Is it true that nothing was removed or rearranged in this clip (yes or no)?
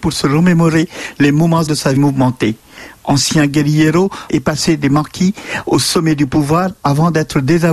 no